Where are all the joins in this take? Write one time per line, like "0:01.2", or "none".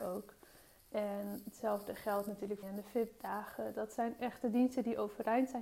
0:02.6